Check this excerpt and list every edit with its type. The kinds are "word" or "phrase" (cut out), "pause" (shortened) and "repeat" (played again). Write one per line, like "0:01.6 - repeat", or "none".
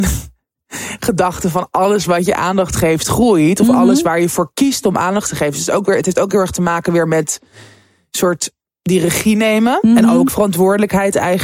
0:10.3 - word